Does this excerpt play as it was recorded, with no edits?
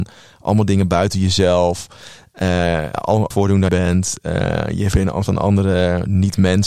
no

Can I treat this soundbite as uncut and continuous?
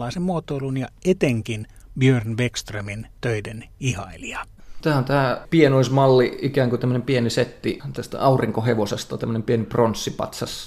yes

